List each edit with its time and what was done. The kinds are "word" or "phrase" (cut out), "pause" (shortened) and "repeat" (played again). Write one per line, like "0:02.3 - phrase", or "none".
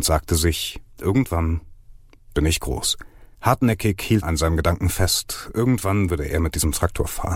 0:00.9 - pause
0:03.3 - pause
0:04.2 - word

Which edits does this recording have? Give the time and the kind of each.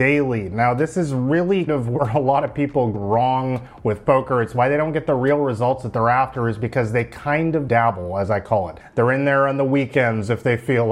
0:01.7 - word
0:02.9 - word
0:07.7 - word

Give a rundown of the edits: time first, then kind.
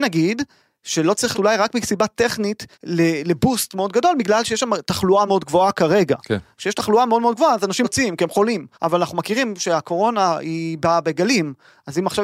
0:01.3 - word
0:02.7 - pause
0:05.3 - word
0:07.8 - word
0:08.7 - pause

